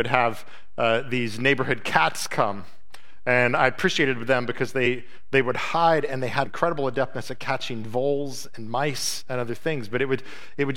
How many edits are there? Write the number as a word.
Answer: one